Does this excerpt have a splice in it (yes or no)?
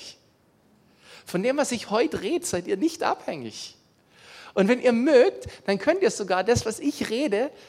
no